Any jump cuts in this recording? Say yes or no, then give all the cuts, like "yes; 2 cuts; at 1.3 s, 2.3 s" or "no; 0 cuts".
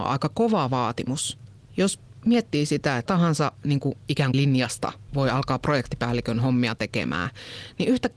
yes; 3 cuts; at 3.1 s, 4.3 s, 5.1 s